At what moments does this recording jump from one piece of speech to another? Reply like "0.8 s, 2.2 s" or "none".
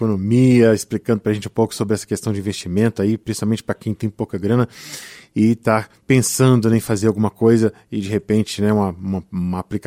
none